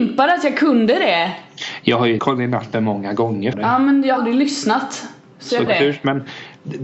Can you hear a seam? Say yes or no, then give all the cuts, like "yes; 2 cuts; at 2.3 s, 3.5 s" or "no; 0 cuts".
yes; 5 cuts; at 2.2 s, 2.7 s, 3.5 s, 4.2 s, 5.7 s